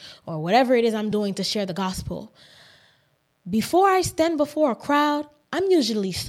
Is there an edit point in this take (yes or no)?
no